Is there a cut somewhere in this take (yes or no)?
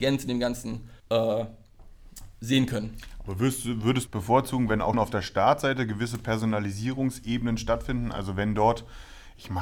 yes